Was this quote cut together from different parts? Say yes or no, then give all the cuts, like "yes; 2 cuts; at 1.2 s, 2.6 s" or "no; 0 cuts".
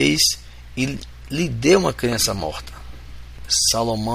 no; 0 cuts